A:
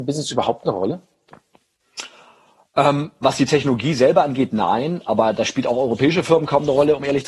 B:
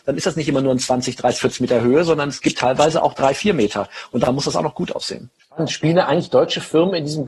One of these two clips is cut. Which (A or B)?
B